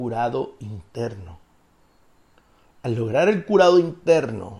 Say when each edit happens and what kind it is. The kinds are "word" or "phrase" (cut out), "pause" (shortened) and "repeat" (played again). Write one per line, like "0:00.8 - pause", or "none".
none

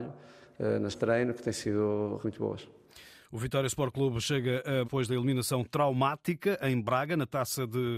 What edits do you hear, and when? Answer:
0:00.9 - word
0:02.2 - word
0:04.8 - word

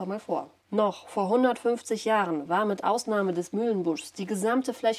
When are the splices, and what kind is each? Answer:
none

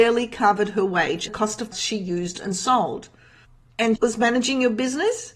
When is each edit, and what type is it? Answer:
0:01.3 - word
0:01.7 - word
0:04.0 - word

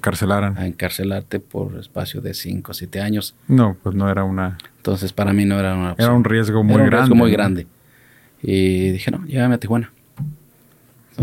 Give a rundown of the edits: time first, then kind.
none

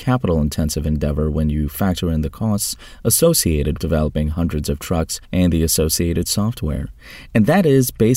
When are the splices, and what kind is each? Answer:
0:03.8 - word
0:05.2 - pause

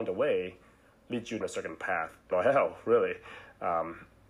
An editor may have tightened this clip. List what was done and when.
0:01.4 - word
0:02.3 - phrase

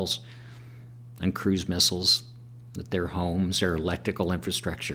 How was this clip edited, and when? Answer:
none

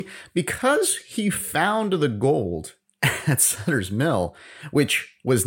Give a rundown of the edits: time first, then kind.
none

